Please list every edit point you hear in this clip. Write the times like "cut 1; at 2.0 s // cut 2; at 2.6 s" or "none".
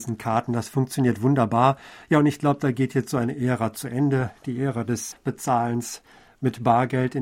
cut 1; at 5.1 s